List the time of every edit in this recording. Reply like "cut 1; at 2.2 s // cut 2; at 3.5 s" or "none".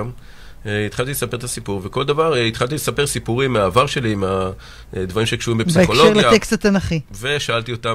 none